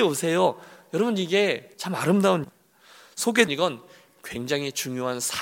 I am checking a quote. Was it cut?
yes; 3 cuts; at 1.7 s, 2.4 s, 3.5 s

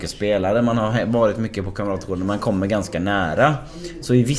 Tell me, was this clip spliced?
no; 0 cuts

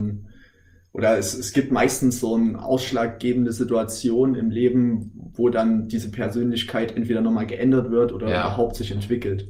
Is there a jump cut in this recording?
no; 0 cuts

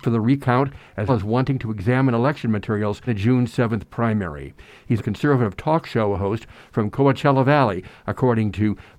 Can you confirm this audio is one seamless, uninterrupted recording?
no; 3 cuts; at 1.1 s, 3.1 s, 5.0 s

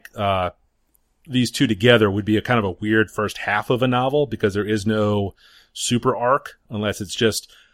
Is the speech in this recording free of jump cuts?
yes; 0 cuts

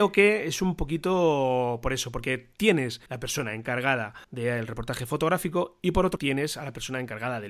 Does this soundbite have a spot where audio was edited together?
yes; 3 cuts; at 3.1 s, 4.2 s, 6.2 s

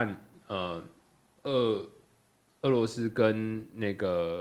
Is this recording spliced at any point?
no; 0 cuts

